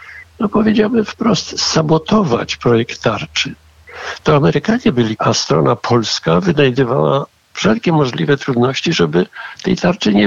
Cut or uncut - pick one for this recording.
cut